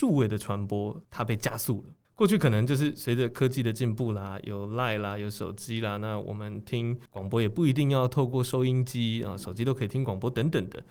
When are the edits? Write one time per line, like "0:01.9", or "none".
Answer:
0:02.0
0:07.1

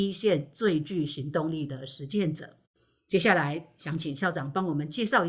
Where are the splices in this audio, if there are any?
none

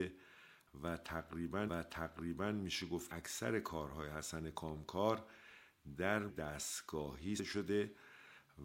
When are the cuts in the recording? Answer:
0:01.7
0:03.1
0:06.3
0:07.4

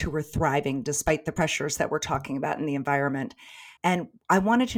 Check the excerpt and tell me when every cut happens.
0:03.8

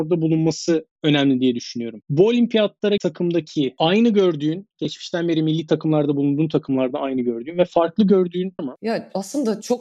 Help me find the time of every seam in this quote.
0:03.0
0:08.6

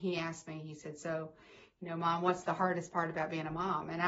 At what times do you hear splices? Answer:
none

